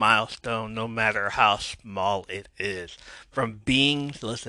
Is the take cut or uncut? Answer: uncut